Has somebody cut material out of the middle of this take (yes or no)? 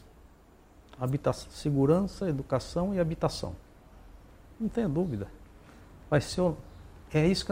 no